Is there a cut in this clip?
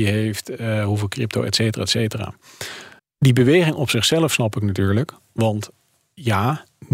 yes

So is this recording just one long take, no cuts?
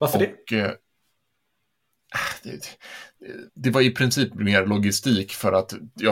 no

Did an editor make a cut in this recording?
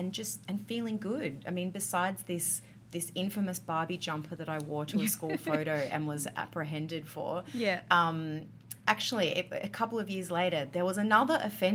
no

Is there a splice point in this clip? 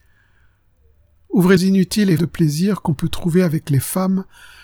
yes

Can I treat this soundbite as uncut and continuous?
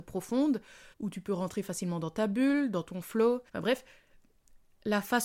no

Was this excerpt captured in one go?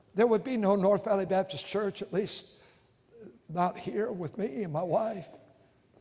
yes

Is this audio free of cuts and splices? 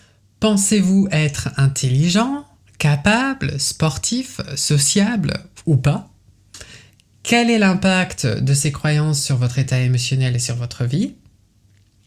yes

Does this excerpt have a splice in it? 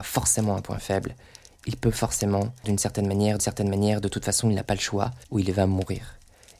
yes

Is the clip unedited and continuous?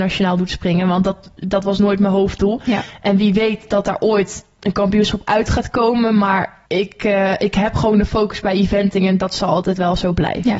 no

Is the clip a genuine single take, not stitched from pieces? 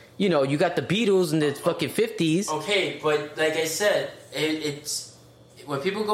yes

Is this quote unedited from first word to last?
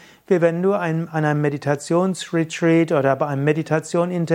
yes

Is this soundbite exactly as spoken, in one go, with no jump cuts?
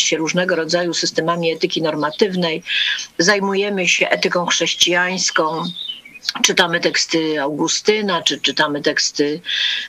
yes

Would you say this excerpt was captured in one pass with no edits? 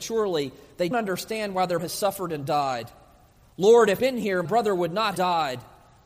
no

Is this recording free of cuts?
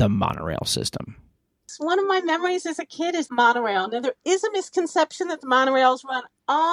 no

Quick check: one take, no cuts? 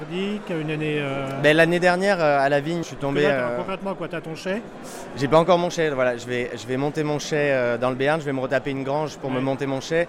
no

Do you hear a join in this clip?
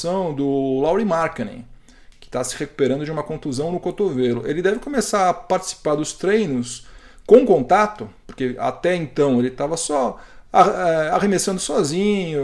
no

